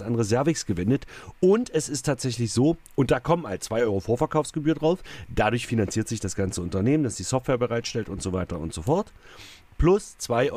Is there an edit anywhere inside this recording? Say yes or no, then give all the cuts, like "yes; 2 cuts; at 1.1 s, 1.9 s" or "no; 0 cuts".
no; 0 cuts